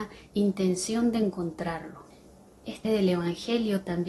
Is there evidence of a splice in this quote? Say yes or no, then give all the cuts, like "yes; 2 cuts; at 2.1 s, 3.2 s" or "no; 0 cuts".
yes; 1 cut; at 2.8 s